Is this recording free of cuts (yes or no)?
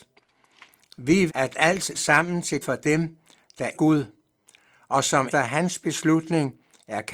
no